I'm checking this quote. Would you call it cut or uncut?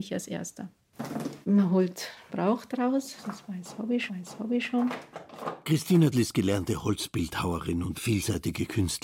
cut